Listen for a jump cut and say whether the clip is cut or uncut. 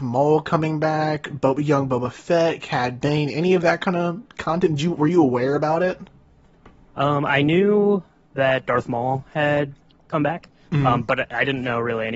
uncut